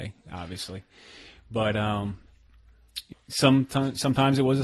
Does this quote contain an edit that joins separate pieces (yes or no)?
yes